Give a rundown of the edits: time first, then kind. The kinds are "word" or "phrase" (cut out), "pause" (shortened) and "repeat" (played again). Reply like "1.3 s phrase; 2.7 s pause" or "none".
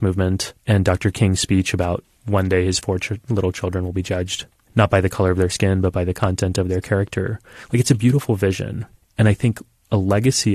none